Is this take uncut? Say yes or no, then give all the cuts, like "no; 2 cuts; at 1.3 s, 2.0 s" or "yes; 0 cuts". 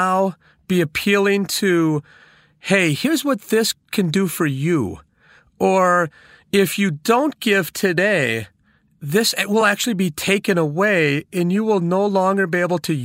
yes; 0 cuts